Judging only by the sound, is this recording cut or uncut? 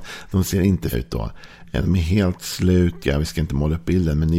cut